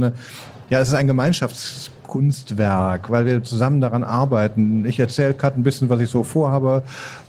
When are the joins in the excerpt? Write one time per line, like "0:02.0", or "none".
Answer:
none